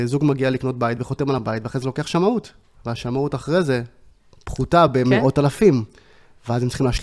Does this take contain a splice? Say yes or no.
no